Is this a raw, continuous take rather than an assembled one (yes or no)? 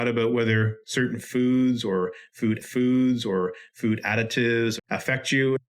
no